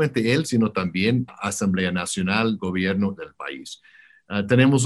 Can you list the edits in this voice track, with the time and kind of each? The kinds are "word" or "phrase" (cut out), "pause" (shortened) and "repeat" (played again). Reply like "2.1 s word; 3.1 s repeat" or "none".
1.3 s word; 2.6 s word; 3.2 s word